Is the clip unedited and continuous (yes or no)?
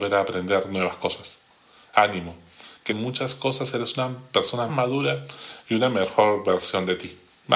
no